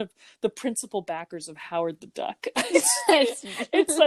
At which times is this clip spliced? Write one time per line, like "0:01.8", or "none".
none